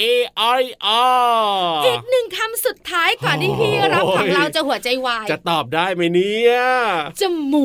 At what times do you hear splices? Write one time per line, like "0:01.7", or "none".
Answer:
none